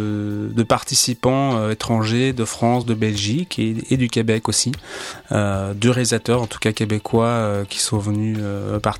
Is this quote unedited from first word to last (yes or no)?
yes